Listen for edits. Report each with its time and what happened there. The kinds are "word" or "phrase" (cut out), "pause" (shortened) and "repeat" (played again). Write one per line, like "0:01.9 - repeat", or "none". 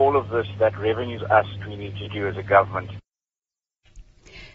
0:01.2 - phrase
0:01.6 - phrase

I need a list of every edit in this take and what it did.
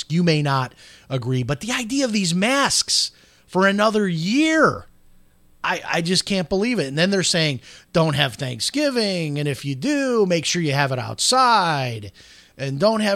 none

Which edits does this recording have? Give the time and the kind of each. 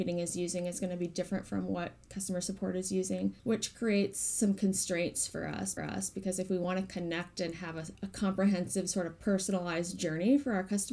0:03.4 - pause
0:05.8 - repeat

